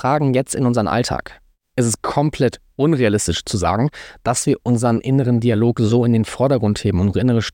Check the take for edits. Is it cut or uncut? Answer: uncut